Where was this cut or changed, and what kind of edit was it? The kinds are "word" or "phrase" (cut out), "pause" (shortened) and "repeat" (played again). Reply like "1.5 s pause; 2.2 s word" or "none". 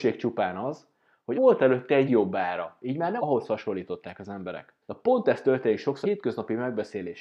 1.3 s word; 2.1 s word; 3.2 s phrase; 4.8 s pause; 6.0 s word